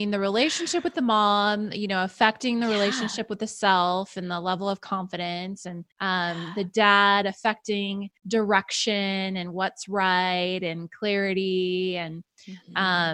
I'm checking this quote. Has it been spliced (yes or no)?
yes